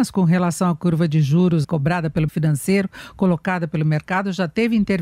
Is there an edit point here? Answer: yes; 2 cuts; at 1.6 s, 2.3 s

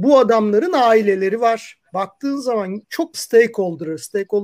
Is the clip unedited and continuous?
no; 3 cuts; at 1.9 s, 2.8 s, 3.1 s

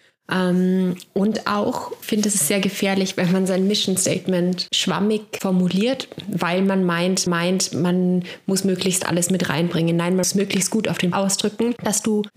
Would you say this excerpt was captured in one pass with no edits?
no; 4 cuts; at 2.0 s, 7.3 s, 10.2 s, 11.1 s

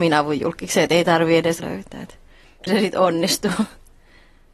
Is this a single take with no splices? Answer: no; 2 cuts; at 1.6 s, 2.7 s

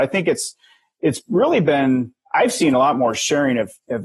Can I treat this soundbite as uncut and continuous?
yes; 0 cuts

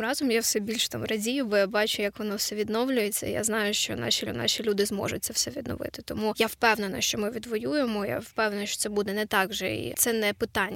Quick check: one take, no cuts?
no; 1 cut; at 4.3 s

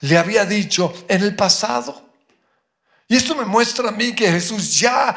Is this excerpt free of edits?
yes; 0 cuts

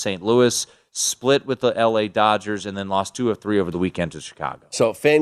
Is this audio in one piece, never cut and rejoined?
yes; 0 cuts

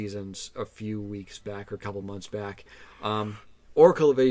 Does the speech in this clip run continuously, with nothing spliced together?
yes; 0 cuts

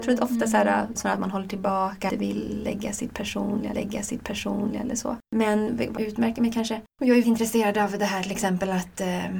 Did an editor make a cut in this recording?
yes; 7 cuts; at 0.9 s, 2.1 s, 3.7 s, 5.3 s, 6.0 s, 6.9 s, 7.2 s

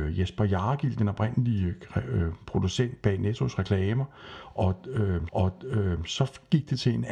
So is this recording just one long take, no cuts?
no; 1 cut; at 5.3 s

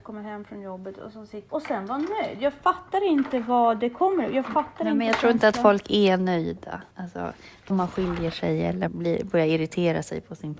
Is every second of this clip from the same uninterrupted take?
no; 4 cuts; at 1.5 s, 6.9 s, 7.7 s, 8.9 s

